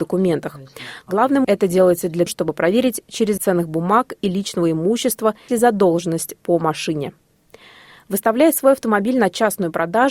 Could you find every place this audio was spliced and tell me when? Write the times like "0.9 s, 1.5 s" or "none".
1.4 s, 2.3 s, 3.4 s, 5.5 s